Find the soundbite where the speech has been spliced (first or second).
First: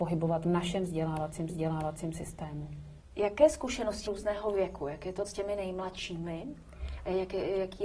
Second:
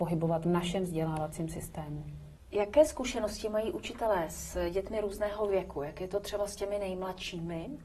first